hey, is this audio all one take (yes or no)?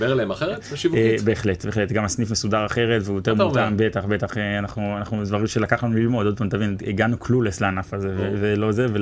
yes